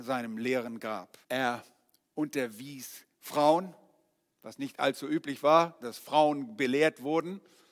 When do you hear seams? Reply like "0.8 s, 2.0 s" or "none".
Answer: 1.2 s, 3.1 s